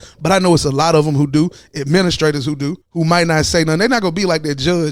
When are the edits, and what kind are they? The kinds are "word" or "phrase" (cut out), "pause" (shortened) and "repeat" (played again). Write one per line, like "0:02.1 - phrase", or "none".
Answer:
0:02.8 - pause